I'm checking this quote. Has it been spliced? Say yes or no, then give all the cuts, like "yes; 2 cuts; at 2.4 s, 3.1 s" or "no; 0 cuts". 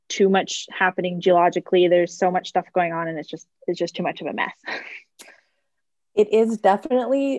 no; 0 cuts